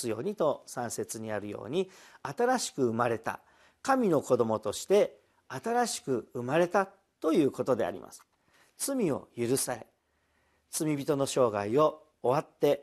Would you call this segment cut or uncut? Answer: uncut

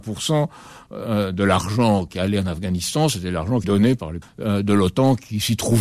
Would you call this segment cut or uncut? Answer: cut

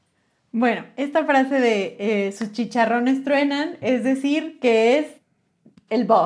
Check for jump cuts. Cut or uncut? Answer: uncut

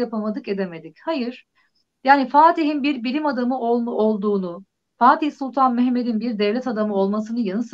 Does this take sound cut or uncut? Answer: uncut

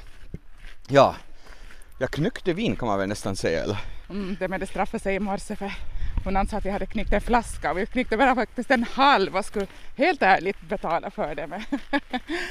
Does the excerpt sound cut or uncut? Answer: uncut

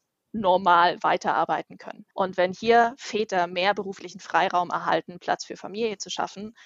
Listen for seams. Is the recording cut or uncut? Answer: cut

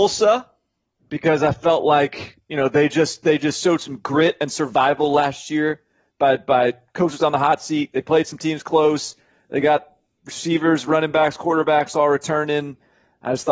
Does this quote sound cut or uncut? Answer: uncut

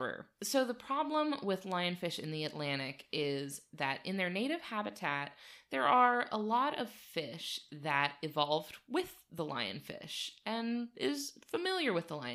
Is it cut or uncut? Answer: uncut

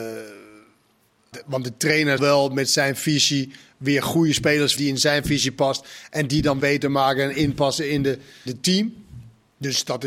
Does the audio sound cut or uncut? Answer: cut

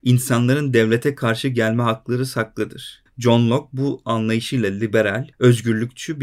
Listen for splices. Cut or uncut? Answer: cut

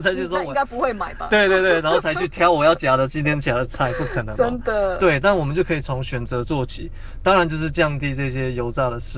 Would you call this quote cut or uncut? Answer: uncut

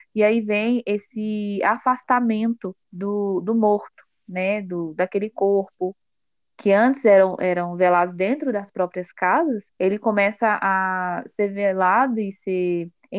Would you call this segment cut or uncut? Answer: cut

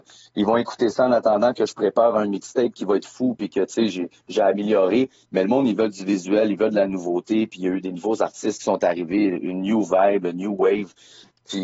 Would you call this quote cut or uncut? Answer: uncut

